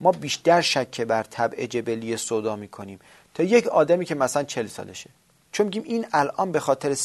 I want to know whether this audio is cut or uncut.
uncut